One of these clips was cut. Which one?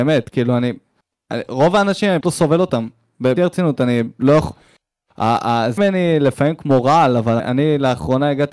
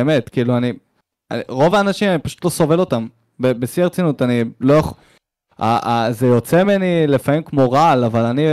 first; 4 cuts; at 2.2 s, 3.4 s, 5.8 s, 7.4 s

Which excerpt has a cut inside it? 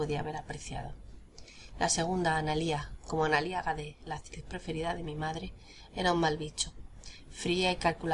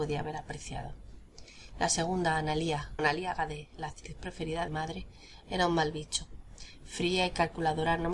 second; 2 cuts; at 3.0 s, 4.7 s

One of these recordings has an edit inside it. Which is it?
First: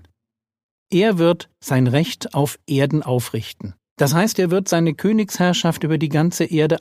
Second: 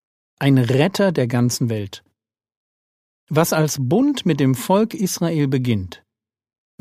first; 2 cuts; at 1.6 s, 3.9 s

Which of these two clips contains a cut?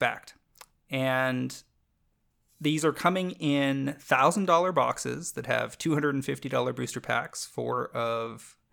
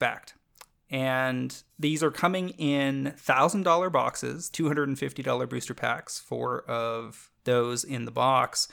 second; 3 cuts; at 1.7 s, 4.5 s, 7.4 s

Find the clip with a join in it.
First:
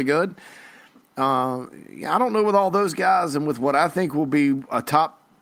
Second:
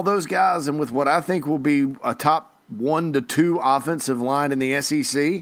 second; 1 cut; at 2.6 s

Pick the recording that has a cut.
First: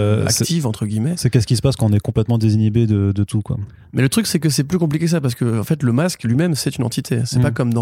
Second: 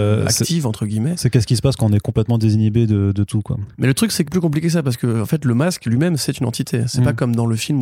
second; 2 cuts; at 3.7 s, 4.3 s

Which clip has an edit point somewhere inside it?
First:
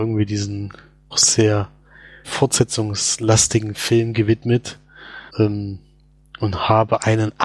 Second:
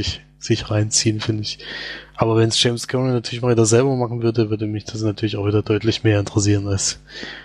first; 3 cuts; at 1.1 s, 2.2 s, 5.3 s

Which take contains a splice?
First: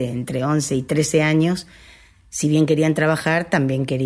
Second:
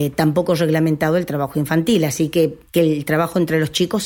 second; 1 cut; at 2.7 s

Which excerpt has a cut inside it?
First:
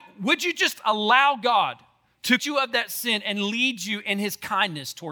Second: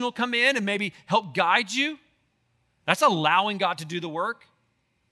first; 1 cut; at 2.4 s

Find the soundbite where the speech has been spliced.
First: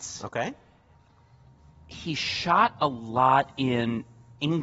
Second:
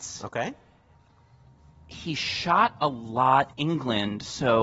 second; 1 cut; at 3.5 s

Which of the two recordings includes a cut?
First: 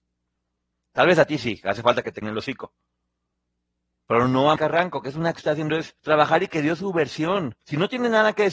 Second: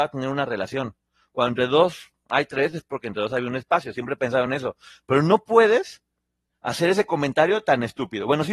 first; 5 cuts; at 2.2 s, 4.6 s, 5.3 s, 6.0 s, 7.6 s

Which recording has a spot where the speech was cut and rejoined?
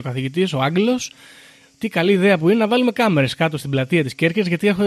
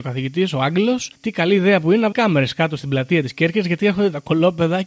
second; 2 cuts; at 1.1 s, 2.1 s

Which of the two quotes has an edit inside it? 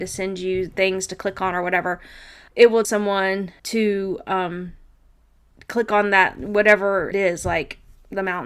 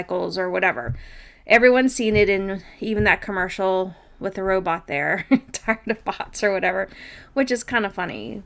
first; 4 cuts; at 2.5 s, 2.8 s, 3.6 s, 7.1 s

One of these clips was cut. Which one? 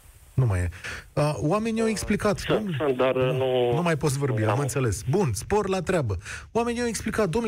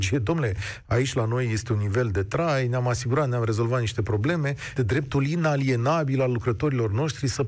second; 1 cut; at 4.8 s

